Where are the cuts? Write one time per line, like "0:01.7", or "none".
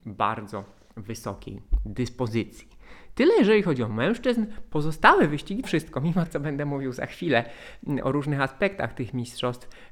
0:05.6
0:06.3